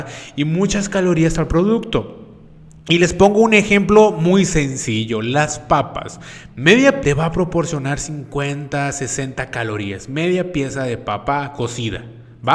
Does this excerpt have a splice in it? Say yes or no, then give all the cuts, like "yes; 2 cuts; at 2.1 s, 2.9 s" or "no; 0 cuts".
yes; 1 cut; at 7.0 s